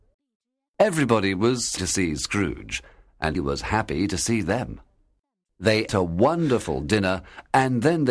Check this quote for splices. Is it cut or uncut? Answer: cut